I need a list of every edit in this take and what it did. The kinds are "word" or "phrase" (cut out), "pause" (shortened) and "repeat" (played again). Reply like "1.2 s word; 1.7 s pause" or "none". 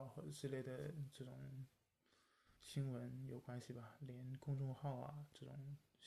2.6 s pause

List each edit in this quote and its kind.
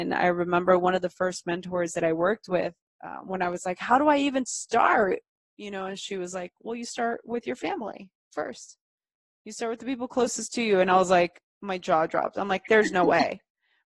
none

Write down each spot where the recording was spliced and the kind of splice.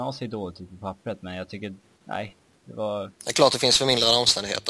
1.8 s pause; 3.1 s pause

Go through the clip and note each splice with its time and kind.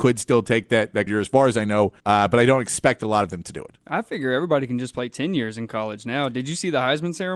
1.1 s word; 2.0 s pause

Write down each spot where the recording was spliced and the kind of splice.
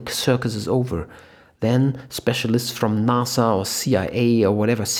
none

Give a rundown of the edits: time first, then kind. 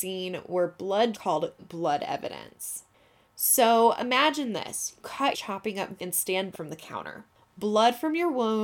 1.1 s word; 1.6 s word; 5.0 s word; 5.3 s word; 6.0 s word; 6.5 s word

